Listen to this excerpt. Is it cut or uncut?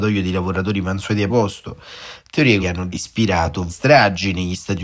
cut